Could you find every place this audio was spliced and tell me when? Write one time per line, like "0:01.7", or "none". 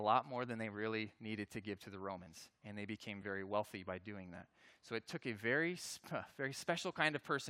none